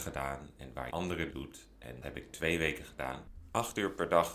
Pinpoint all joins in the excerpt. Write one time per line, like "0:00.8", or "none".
0:00.9
0:01.3
0:02.0